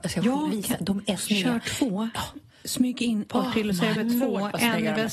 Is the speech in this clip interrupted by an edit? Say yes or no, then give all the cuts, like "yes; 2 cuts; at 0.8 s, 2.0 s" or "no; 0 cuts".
yes; 3 cuts; at 1.2 s, 3.3 s, 4.0 s